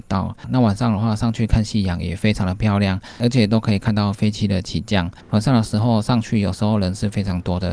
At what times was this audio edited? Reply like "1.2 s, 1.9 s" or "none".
5.2 s